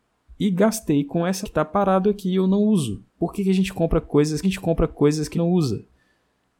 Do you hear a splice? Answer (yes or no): yes